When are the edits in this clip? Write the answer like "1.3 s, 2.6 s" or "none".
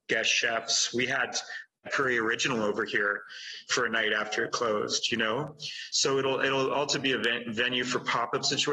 none